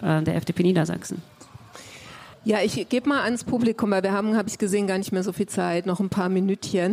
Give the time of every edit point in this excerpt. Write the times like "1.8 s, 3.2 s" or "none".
2.3 s